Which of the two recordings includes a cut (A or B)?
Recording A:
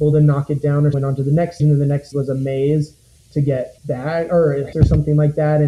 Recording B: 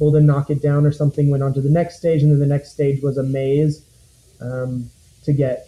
A